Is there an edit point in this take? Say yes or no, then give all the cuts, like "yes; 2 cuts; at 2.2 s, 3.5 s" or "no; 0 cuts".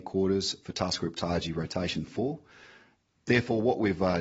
no; 0 cuts